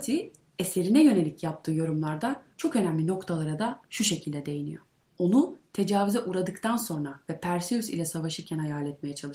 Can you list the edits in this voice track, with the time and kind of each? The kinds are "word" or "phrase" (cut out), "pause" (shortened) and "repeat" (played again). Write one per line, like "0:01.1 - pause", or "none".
none